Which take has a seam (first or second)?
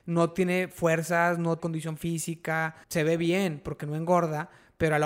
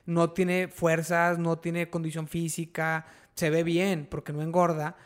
first